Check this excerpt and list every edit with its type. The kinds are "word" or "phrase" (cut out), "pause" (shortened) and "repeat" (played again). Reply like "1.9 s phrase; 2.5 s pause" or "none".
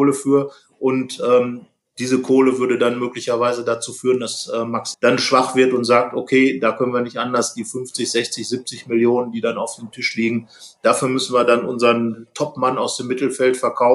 4.9 s phrase